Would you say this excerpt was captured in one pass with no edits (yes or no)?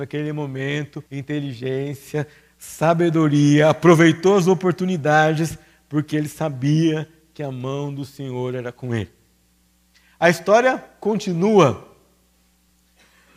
no